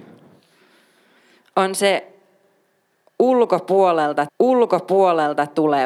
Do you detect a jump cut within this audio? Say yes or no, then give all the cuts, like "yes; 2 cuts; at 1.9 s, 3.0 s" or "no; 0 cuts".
yes; 1 cut; at 4.3 s